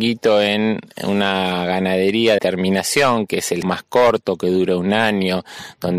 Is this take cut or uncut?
cut